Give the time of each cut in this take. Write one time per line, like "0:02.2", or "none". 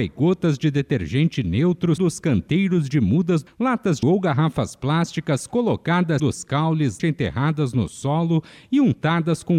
0:02.0
0:03.5
0:04.0
0:06.2
0:07.0